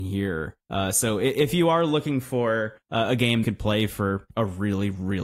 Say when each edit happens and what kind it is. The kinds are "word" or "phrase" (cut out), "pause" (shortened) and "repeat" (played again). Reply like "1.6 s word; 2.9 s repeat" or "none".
2.8 s pause; 3.4 s phrase